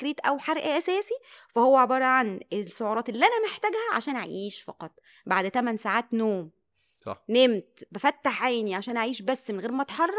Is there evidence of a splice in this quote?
no; 0 cuts

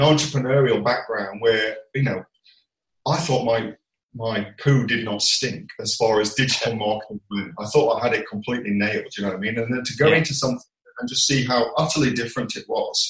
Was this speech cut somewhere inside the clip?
no; 0 cuts

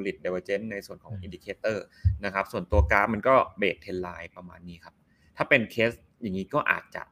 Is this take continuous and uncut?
yes; 0 cuts

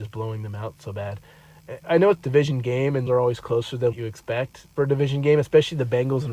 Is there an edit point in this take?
yes; 5 cuts; at 1.8 s, 2.2 s, 3.1 s, 3.9 s, 4.8 s

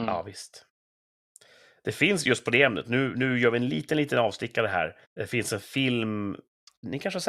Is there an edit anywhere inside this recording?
yes; 1 cut; at 5.0 s

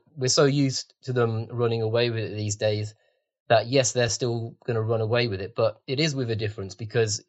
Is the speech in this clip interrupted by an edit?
no; 0 cuts

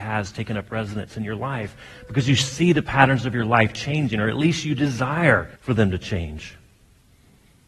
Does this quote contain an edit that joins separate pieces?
yes; 1 cut; at 5.6 s

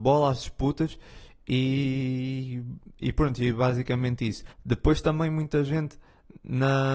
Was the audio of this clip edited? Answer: yes; 1 cut; at 4.5 s

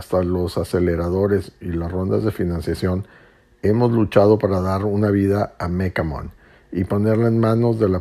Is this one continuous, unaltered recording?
yes; 0 cuts

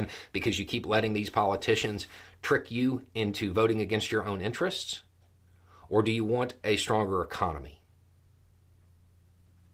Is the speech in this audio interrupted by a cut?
no; 0 cuts

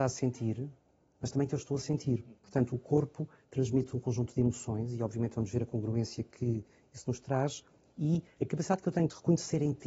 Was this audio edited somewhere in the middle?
no; 0 cuts

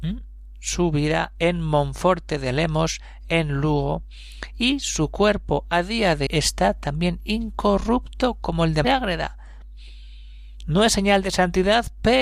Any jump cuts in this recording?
yes; 2 cuts; at 6.3 s, 8.8 s

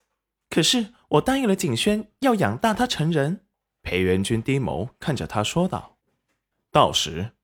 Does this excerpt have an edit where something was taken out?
yes; 2 cuts; at 3.5 s, 6.0 s

